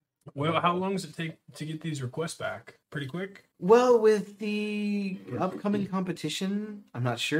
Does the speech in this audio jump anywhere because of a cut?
yes; 2 cuts; at 2.8 s, 3.5 s

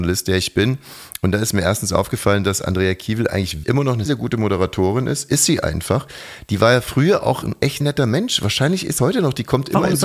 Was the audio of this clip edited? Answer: yes; 4 cuts; at 3.6 s, 4.1 s, 7.8 s, 9.0 s

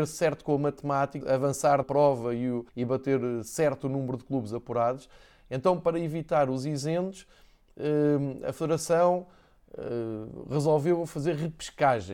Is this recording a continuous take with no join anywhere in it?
no; 3 cuts; at 1.2 s, 1.8 s, 2.7 s

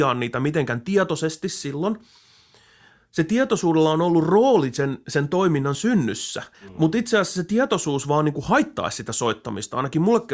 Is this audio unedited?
no; 1 cut; at 6.5 s

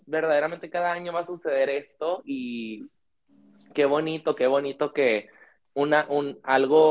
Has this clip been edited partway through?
no; 0 cuts

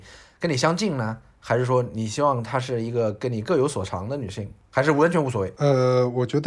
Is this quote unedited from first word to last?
yes; 0 cuts

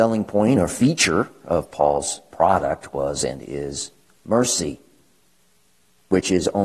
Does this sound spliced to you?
no; 0 cuts

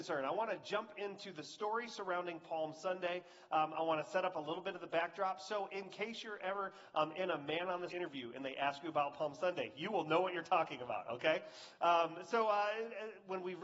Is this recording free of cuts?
no; 1 cut; at 7.9 s

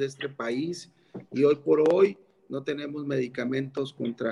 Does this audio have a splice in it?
no; 0 cuts

